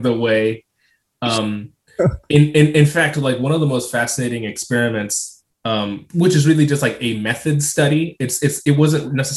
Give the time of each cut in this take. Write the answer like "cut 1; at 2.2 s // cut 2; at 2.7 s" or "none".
cut 1; at 5.5 s